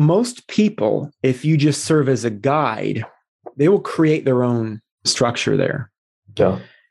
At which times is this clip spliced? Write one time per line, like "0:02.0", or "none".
none